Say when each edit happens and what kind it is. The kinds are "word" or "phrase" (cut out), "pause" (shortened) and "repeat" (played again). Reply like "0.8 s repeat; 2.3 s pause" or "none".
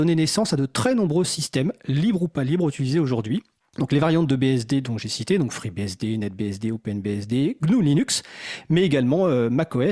none

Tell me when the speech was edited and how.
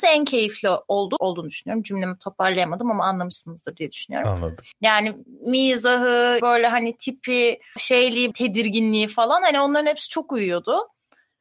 1.2 s word; 4.7 s pause; 6.4 s word; 7.8 s word; 8.3 s phrase

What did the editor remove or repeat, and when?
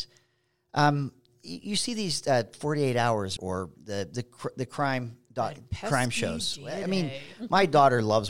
3.4 s word

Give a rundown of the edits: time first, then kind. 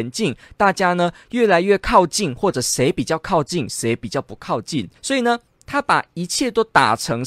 5.0 s pause

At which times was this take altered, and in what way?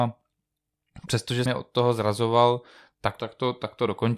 1.5 s word; 3.2 s word

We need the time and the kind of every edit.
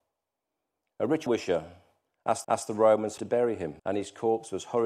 1.3 s word; 2.4 s repeat; 3.2 s phrase; 3.8 s pause

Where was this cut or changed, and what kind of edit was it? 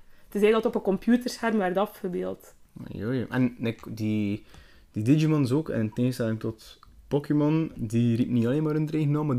7.7 s word

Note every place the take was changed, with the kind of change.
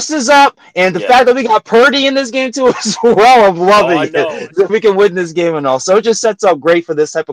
4.7 s phrase

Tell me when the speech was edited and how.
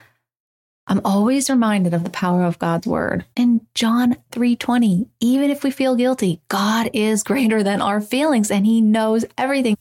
3.3 s pause

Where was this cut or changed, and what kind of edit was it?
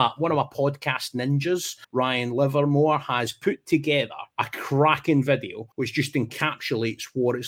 1.8 s pause; 4.3 s pause; 5.7 s pause

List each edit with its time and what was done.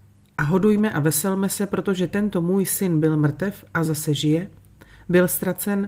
none

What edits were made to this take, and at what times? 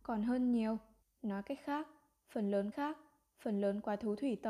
1.0 s pause; 2.7 s repeat

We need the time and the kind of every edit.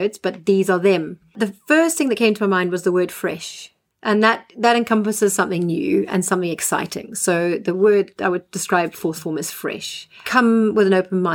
none

